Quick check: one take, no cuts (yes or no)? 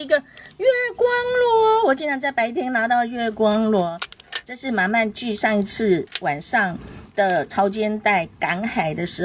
no